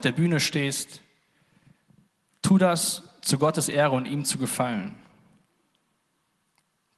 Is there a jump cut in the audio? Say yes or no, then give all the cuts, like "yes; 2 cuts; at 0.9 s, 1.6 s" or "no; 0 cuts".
no; 0 cuts